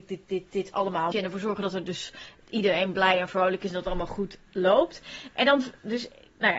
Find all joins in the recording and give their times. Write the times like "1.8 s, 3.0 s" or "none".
1.1 s, 2.4 s, 4.5 s